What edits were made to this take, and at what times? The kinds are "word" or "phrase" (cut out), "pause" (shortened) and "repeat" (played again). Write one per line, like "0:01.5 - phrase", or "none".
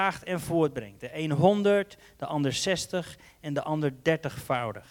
none